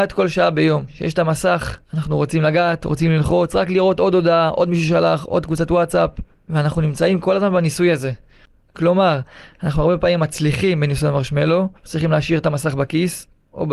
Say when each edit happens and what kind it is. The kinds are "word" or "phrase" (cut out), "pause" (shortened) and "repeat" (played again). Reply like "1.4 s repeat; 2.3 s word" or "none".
1.8 s pause; 6.3 s pause; 11.8 s pause

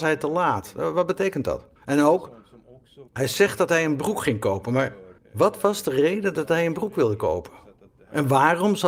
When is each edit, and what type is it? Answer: 1.8 s pause; 3.1 s pause; 5.2 s pause

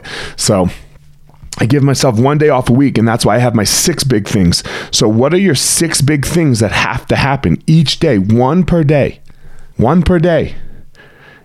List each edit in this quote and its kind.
9.7 s pause

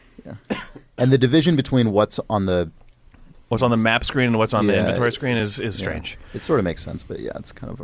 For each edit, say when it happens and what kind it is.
none

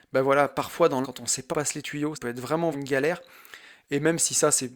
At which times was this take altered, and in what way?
1.0 s word; 1.5 s word; 2.1 s word; 2.7 s word

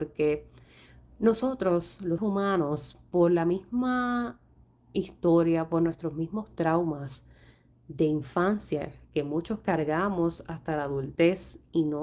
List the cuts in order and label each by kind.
2.2 s word

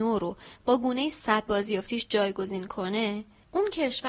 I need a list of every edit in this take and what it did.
1.5 s word

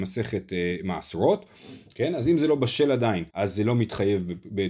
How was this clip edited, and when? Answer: 3.3 s pause

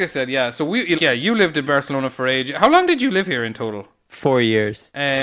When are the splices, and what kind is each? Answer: 0.9 s word

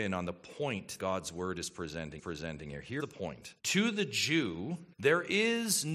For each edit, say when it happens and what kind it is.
1.0 s word; 2.2 s repeat; 3.0 s word; 3.6 s pause; 4.9 s pause

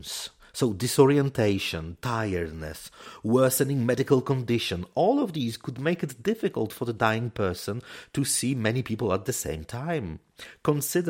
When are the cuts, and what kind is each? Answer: none

